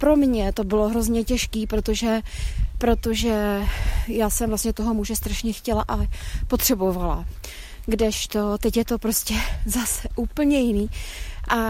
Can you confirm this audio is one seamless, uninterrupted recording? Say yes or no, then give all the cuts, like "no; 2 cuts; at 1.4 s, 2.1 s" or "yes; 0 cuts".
yes; 0 cuts